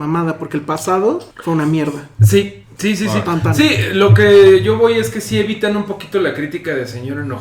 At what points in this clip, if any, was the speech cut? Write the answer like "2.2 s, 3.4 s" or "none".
1.3 s